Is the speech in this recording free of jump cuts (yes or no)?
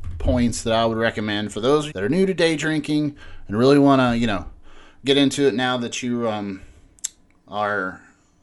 no